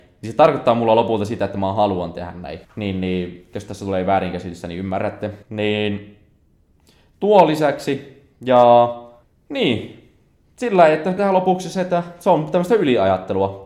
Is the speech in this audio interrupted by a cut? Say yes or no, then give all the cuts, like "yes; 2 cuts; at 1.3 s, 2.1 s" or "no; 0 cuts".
yes; 4 cuts; at 2.6 s, 5.4 s, 9.2 s, 11.2 s